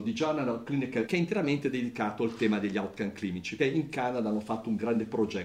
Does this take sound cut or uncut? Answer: cut